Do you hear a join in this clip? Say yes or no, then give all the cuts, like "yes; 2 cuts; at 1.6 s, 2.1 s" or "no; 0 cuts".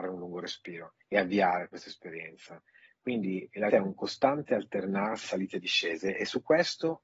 yes; 3 cuts; at 1.0 s, 3.7 s, 5.2 s